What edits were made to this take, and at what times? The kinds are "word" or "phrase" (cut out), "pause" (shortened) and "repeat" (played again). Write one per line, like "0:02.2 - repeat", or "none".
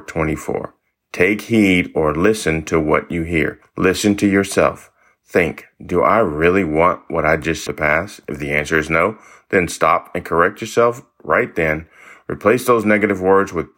0:03.6 - pause
0:07.7 - phrase

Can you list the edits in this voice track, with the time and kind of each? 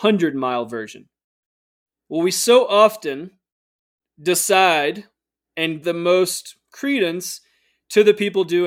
0:03.8 - pause
0:05.8 - word

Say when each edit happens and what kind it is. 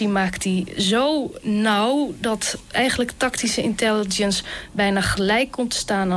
0:02.7 - word

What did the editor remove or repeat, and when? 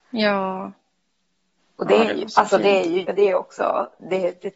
0:03.0 - word

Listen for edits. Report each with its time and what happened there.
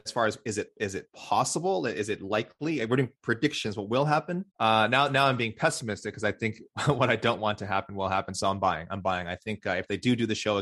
0:04.5 - pause

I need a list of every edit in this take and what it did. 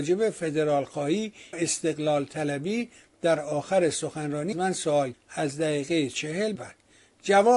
0:01.5 - word
0:04.5 - word
0:05.1 - word
0:06.5 - word

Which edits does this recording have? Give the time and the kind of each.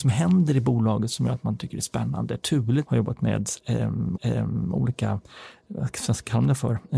0:02.8 - phrase
0:04.2 - repeat

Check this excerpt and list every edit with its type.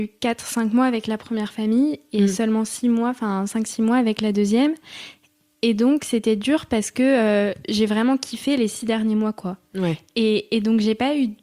none

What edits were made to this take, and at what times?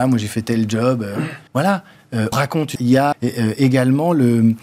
0:01.5 - pause
0:02.3 - word
0:02.8 - word
0:03.1 - word

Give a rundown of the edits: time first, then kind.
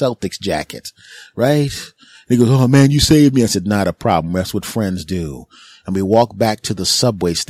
none

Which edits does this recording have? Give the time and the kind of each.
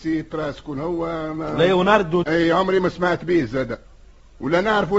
0:02.2 - word

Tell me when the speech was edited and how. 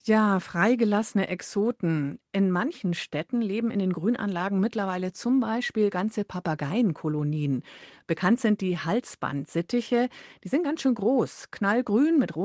none

